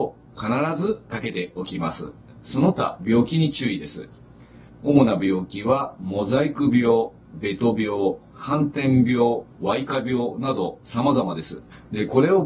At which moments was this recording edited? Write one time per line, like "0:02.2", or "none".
0:04.7